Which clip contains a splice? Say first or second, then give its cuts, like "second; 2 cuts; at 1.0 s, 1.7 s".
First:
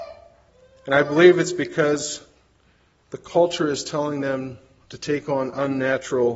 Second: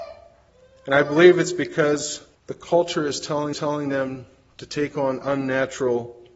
second; 2 cuts; at 2.3 s, 3.5 s